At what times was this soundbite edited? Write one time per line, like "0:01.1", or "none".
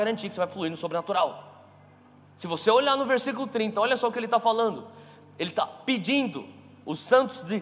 none